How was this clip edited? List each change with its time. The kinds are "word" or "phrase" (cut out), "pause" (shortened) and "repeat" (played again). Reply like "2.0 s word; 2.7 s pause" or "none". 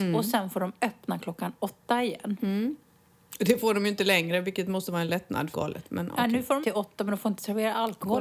5.5 s phrase; 6.6 s word

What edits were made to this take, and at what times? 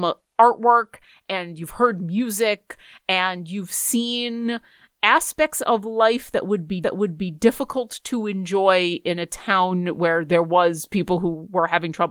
6.8 s repeat

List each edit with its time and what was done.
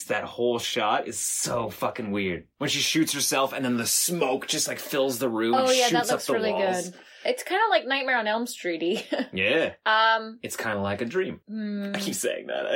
11.4 s pause

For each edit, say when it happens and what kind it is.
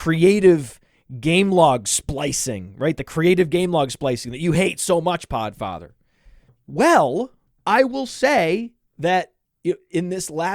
none

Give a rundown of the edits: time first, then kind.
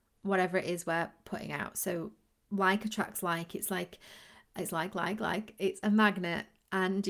none

